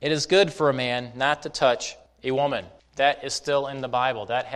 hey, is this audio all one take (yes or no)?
yes